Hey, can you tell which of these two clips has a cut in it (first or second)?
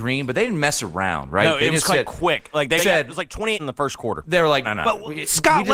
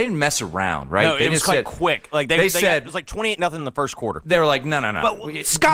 first